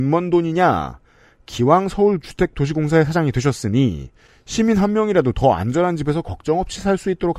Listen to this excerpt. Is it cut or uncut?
uncut